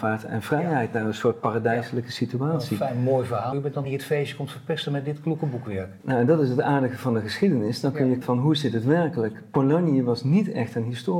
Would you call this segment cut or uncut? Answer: cut